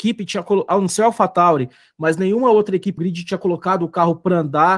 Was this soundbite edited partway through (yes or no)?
yes